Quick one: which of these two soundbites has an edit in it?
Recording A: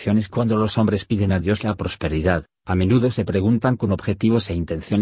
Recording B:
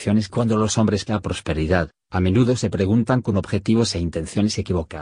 B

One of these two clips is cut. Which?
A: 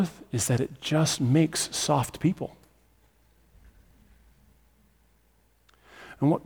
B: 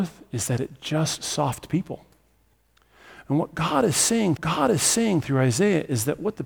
B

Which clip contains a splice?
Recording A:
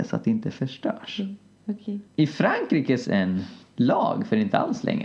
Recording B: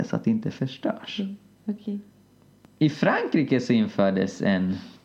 A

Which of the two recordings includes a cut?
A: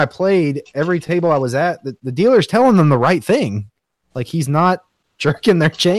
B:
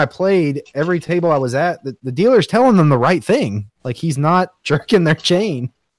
B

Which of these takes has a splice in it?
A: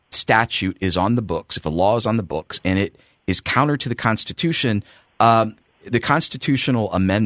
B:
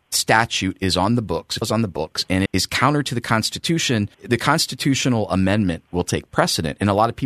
B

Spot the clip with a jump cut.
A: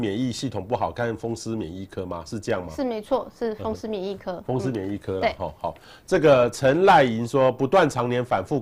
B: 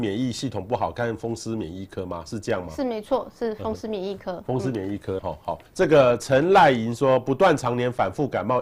B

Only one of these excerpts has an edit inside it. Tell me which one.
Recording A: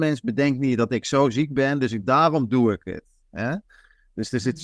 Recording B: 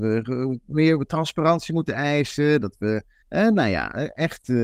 B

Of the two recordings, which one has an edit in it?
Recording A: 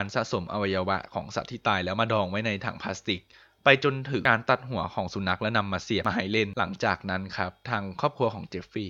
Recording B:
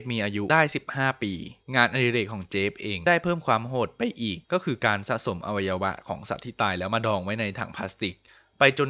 B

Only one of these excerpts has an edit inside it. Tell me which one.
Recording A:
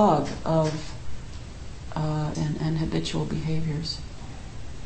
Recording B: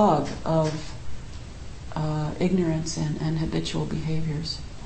A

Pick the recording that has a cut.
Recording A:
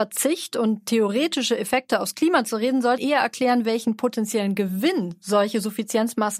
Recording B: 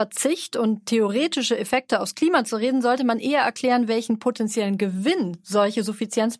A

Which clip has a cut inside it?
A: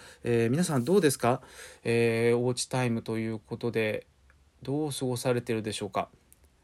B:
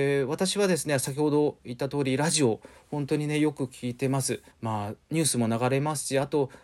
B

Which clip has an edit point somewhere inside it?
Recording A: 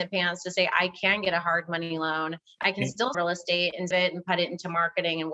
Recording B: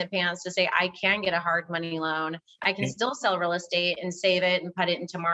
A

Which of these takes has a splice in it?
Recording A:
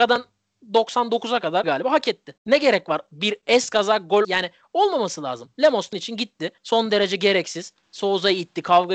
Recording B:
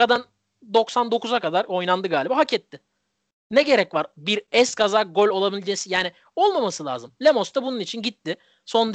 A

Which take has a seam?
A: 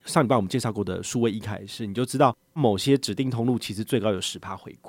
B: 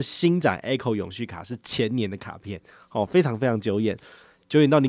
A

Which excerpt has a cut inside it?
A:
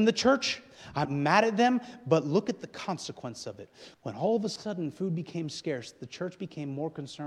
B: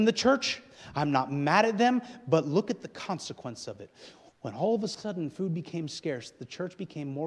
A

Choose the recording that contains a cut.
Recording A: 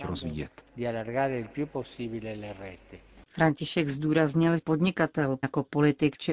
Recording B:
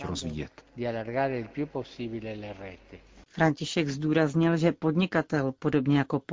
A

